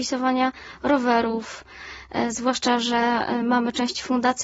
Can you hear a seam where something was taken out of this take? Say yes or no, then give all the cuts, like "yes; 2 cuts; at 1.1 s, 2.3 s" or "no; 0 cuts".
no; 0 cuts